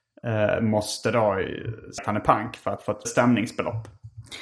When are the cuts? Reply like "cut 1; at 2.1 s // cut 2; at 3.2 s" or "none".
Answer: cut 1; at 2.0 s // cut 2; at 3.0 s

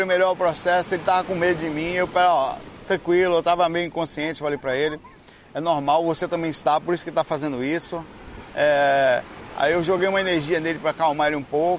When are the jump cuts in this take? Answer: none

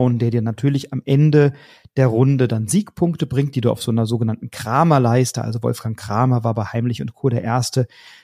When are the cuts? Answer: none

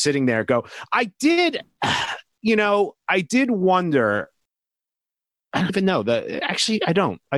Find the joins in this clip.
cut 1; at 5.7 s

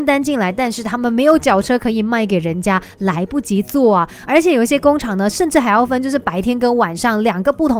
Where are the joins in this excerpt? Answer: none

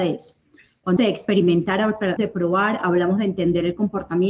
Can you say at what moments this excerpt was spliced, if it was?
cut 1; at 1.0 s // cut 2; at 2.2 s

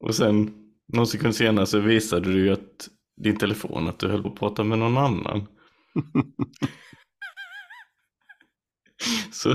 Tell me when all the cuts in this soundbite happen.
cut 1; at 4.2 s

